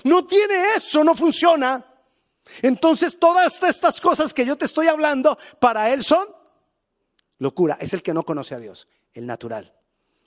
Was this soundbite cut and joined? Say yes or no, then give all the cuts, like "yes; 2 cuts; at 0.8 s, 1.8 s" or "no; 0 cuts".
no; 0 cuts